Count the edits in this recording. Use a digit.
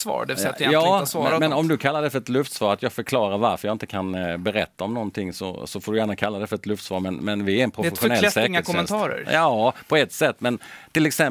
0